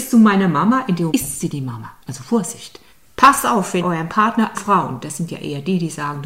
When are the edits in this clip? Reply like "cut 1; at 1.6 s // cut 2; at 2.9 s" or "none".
cut 1; at 1.1 s // cut 2; at 2.0 s // cut 3; at 2.9 s // cut 4; at 3.8 s // cut 5; at 4.5 s